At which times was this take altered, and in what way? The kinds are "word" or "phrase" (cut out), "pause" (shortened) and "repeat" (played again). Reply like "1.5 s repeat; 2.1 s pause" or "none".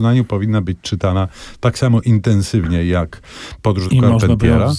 3.9 s phrase